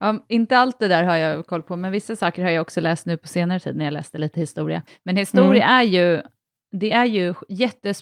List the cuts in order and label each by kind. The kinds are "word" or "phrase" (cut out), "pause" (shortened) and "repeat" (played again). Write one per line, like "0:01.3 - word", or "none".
0:04.9 - pause